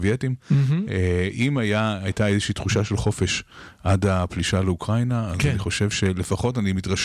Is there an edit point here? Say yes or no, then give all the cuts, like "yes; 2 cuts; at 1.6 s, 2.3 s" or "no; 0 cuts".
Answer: no; 0 cuts